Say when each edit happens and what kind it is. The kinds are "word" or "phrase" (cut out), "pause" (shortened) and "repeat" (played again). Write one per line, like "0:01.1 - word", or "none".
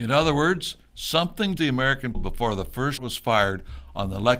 0:01.6 - word
0:02.1 - word
0:03.0 - word